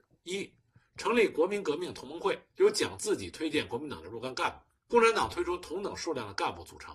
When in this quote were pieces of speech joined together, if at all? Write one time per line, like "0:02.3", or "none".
0:02.5
0:04.8

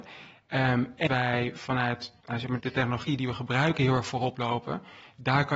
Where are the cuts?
0:01.1
0:02.2
0:02.6

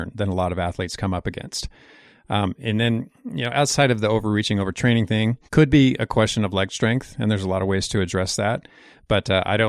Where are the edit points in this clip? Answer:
0:05.5

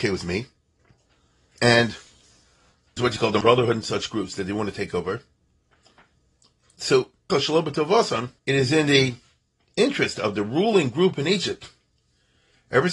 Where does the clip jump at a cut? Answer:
0:03.0
0:03.4
0:07.3
0:08.4

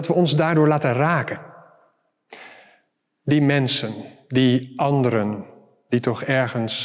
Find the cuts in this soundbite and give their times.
none

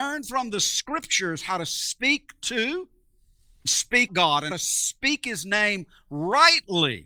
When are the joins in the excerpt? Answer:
0:03.6
0:04.1
0:04.5

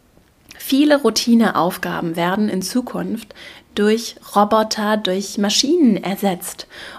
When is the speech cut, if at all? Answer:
none

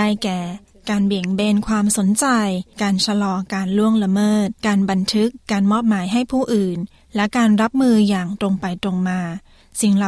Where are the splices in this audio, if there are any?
0:04.6
0:05.4

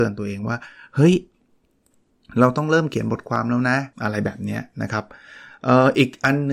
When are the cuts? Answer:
0:03.9

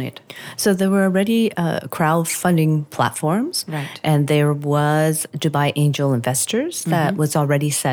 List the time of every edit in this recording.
none

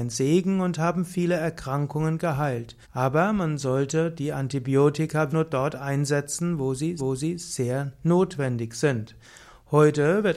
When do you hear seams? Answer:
0:02.8
0:05.3
0:07.0

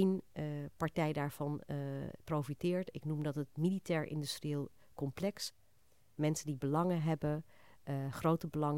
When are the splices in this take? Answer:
none

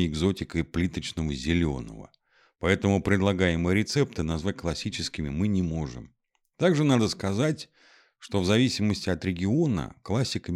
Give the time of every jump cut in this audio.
none

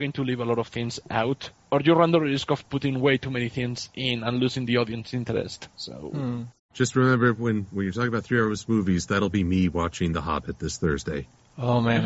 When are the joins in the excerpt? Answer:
none

